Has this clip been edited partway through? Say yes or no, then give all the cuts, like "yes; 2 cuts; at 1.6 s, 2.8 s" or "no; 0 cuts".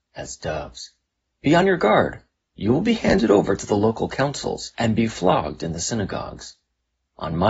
no; 0 cuts